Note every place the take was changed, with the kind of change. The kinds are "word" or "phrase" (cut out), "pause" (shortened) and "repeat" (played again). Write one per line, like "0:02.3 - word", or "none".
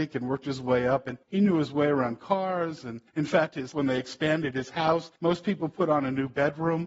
0:01.2 - pause
0:03.1 - pause
0:03.7 - word
0:05.2 - pause